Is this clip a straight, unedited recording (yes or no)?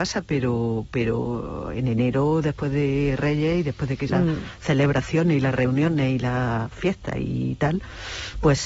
no